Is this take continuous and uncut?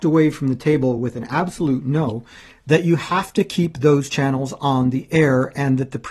yes; 0 cuts

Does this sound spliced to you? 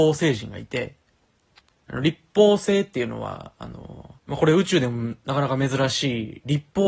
yes; 1 cut; at 4.2 s

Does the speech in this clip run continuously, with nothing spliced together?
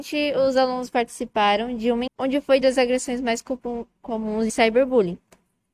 no; 3 cuts; at 2.1 s, 2.6 s, 4.5 s

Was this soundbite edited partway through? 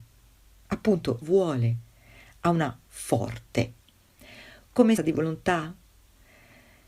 yes; 3 cuts; at 1.2 s, 2.9 s, 5.0 s

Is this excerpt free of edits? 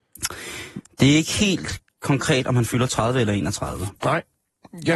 no; 1 cut; at 4.0 s

